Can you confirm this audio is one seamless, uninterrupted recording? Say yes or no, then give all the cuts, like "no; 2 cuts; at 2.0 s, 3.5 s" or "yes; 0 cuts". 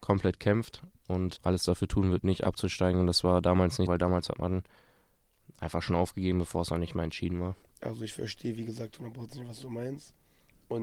no; 3 cuts; at 1.4 s, 3.9 s, 7.6 s